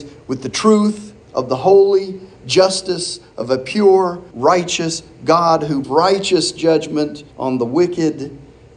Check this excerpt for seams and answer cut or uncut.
cut